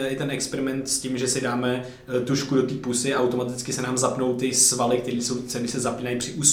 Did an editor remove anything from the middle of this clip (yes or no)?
no